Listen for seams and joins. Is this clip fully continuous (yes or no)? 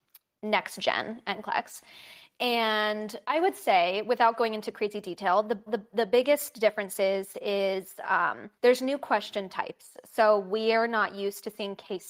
no